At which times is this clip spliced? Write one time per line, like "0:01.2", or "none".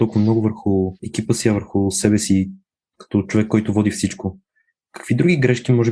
0:01.0